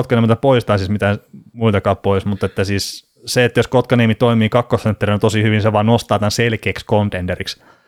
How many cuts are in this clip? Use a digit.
1